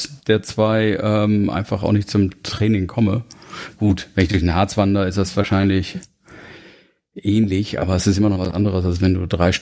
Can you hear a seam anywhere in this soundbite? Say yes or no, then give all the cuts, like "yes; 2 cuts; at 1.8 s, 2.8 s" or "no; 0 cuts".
no; 0 cuts